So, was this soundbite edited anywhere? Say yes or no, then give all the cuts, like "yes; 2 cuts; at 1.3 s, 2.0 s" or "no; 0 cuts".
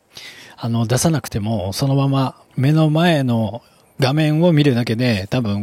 yes; 1 cut; at 2.5 s